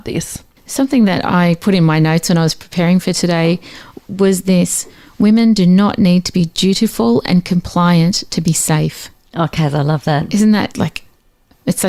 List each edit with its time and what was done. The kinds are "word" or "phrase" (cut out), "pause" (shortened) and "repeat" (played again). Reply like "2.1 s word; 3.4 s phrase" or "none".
10.7 s word

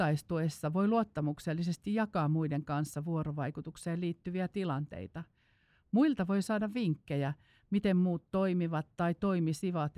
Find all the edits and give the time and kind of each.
none

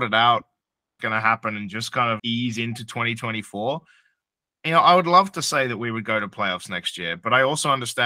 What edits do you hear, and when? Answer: 1.0 s phrase; 2.2 s word

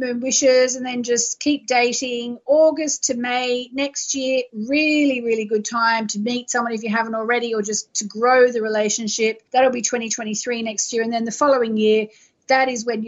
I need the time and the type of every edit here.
9.5 s pause

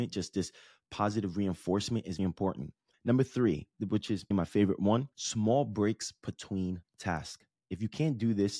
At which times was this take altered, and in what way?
2.2 s word; 2.9 s pause; 4.3 s word; 5.1 s pause

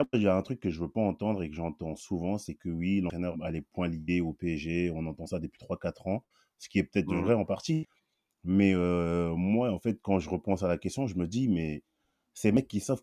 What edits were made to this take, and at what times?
3.3 s word

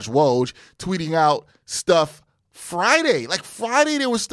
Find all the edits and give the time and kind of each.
none

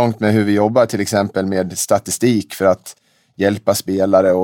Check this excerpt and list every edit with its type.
none

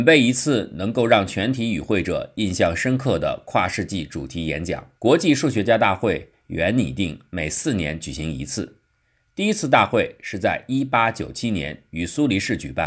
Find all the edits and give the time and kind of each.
5.0 s pause

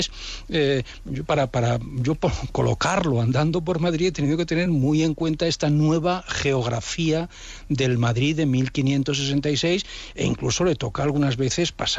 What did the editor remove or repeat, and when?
none

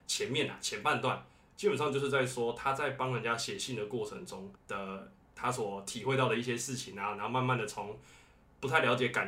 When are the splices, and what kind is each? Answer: 4.6 s pause

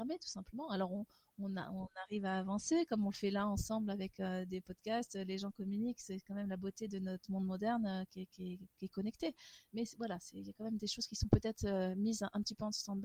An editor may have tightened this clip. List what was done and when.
none

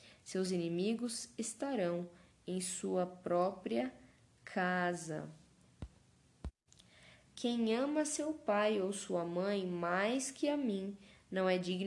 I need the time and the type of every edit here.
none

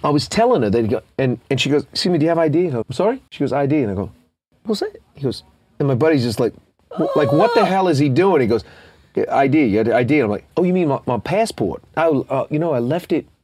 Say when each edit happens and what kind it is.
2.8 s word; 3.3 s pause; 10.5 s pause

